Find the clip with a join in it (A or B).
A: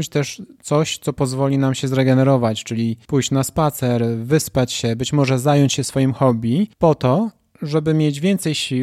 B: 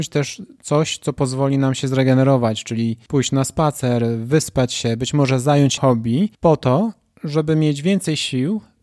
B